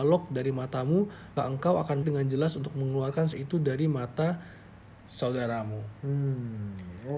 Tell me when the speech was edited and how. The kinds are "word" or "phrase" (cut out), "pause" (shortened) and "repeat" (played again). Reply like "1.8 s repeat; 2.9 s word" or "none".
1.4 s word; 2.0 s word; 3.3 s word